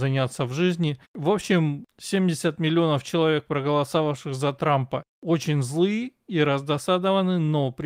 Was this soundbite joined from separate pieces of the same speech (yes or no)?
yes